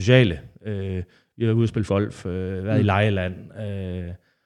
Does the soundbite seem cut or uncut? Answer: cut